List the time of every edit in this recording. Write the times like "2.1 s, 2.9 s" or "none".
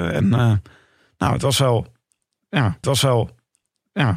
2.8 s